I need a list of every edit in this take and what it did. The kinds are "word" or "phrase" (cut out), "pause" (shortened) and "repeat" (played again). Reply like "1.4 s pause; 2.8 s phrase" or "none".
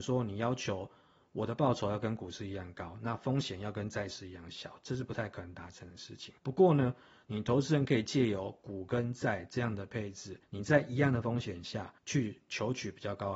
6.4 s pause; 10.4 s pause; 12.0 s pause